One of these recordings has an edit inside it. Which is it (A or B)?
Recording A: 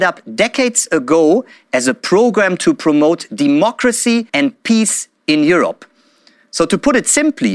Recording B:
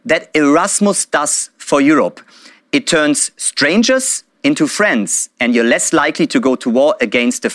A